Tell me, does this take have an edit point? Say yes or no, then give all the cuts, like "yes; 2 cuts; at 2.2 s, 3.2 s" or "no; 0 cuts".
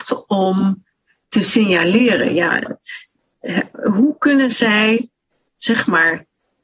no; 0 cuts